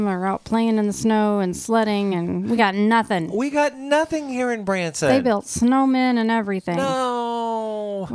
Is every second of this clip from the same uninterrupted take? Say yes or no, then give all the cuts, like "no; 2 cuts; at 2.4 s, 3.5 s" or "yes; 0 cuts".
yes; 0 cuts